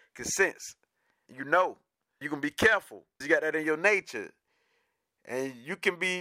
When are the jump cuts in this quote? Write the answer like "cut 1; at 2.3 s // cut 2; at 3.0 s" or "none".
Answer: cut 1; at 1.3 s // cut 2; at 2.2 s // cut 3; at 3.2 s